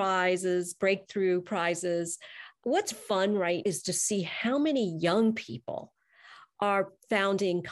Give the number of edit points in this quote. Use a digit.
2